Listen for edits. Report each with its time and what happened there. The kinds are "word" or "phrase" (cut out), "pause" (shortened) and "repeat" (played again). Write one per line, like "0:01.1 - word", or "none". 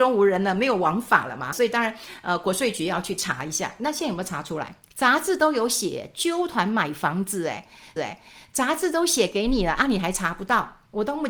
0:01.5 - word
0:04.8 - pause
0:08.0 - repeat